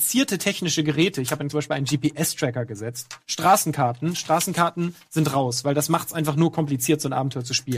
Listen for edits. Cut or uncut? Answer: cut